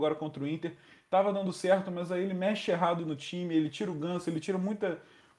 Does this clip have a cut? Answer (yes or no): no